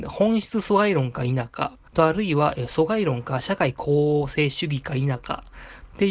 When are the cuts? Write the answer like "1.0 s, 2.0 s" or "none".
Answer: 1.9 s